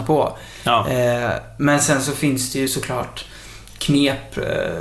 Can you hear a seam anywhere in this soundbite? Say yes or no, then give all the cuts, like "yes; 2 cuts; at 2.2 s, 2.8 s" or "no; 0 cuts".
no; 0 cuts